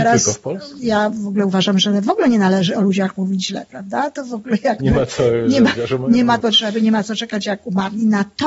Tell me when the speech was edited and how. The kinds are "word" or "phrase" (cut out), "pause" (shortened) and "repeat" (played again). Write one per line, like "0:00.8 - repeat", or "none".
0:05.8 - word
0:06.4 - word